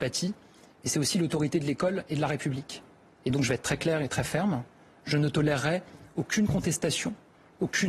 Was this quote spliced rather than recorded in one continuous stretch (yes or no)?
no